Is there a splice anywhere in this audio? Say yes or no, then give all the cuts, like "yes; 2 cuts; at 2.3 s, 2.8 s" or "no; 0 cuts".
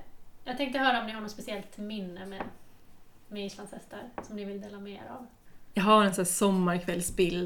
no; 0 cuts